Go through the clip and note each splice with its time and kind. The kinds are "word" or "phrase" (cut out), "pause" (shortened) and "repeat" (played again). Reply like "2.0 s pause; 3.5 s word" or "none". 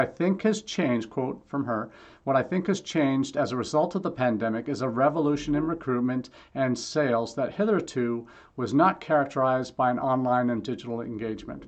none